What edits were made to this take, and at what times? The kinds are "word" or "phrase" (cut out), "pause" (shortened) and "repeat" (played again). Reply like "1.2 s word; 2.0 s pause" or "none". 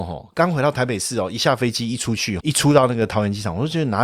2.4 s word